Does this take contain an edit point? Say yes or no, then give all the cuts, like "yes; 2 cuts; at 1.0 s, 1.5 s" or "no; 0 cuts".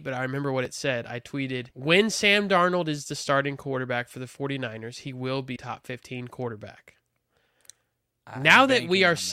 yes; 2 cuts; at 1.7 s, 5.6 s